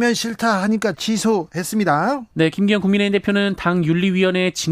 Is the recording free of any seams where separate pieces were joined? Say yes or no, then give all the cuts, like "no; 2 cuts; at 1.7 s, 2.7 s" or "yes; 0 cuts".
no; 2 cuts; at 0.9 s, 2.3 s